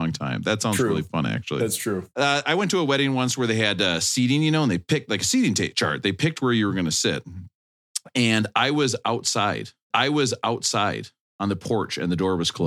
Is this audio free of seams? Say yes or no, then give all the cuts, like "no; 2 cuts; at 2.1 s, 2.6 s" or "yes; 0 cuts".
no; 2 cuts; at 2.1 s, 9.9 s